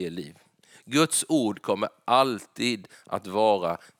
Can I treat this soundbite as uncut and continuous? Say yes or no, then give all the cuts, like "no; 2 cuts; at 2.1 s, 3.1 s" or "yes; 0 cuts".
yes; 0 cuts